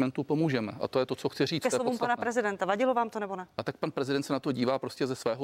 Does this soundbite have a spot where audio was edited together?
no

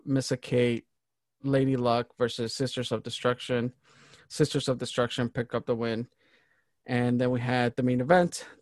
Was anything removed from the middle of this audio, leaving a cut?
no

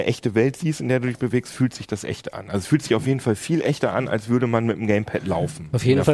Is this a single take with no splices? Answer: yes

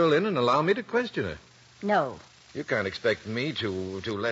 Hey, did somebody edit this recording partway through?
no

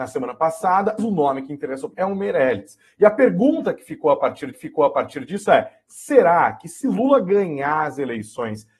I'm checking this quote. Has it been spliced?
yes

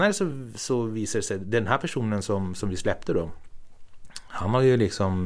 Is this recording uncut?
yes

